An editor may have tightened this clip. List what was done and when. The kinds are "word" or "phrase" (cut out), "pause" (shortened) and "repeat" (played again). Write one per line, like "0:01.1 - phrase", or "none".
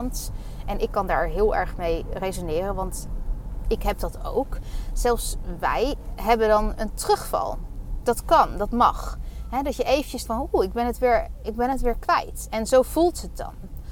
0:10.2 - word